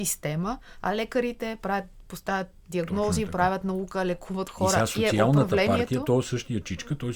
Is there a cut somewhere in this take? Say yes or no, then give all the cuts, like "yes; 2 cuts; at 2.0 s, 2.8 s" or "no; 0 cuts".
no; 0 cuts